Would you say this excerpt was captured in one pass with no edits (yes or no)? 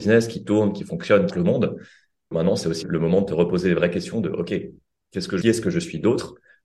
no